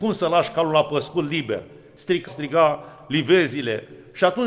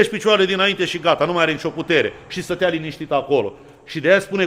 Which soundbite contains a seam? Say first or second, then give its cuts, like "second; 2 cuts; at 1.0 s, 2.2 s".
first; 1 cut; at 2.3 s